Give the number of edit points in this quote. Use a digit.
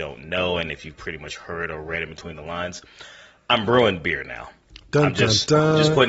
0